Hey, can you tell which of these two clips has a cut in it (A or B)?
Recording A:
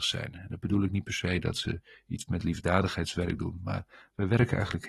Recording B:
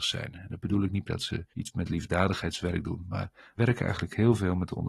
B